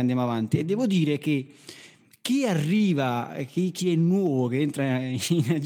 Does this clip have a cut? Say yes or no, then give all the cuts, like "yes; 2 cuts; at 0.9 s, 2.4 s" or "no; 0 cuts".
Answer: no; 0 cuts